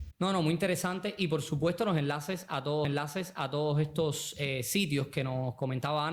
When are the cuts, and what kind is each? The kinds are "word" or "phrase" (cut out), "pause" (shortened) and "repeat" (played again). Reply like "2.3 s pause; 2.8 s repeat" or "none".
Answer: 2.8 s repeat